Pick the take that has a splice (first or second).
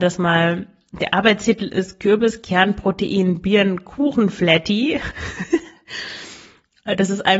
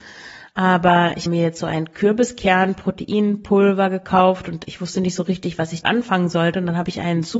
second